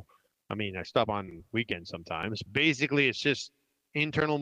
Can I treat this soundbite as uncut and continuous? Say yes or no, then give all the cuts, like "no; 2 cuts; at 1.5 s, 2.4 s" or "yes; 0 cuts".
no; 1 cut; at 2.5 s